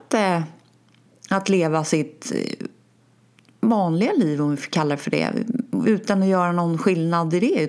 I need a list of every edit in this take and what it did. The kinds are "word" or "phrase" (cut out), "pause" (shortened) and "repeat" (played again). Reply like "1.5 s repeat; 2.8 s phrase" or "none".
none